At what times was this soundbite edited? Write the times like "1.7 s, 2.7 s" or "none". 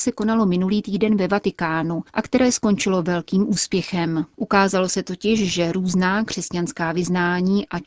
4.3 s